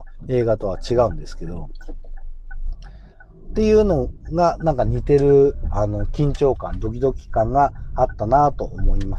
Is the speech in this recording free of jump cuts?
yes; 0 cuts

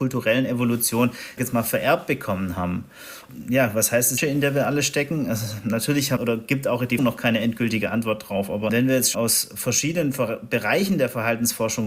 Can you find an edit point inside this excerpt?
yes; 5 cuts; at 1.4 s, 4.2 s, 6.2 s, 7.0 s, 9.1 s

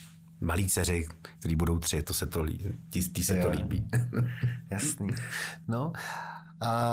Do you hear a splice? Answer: yes; 1 cut; at 2.0 s

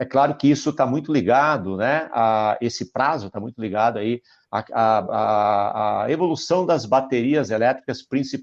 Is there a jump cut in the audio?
no; 0 cuts

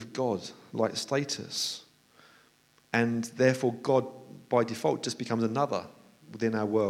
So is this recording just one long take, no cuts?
yes; 0 cuts

